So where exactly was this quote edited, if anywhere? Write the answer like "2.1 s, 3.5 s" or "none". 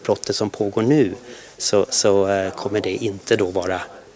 none